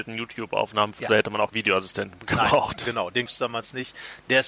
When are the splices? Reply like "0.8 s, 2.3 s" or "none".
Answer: 1.0 s, 1.5 s, 3.3 s